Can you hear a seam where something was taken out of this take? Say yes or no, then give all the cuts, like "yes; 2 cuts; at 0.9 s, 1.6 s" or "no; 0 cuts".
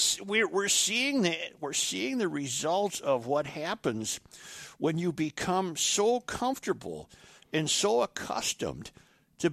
no; 0 cuts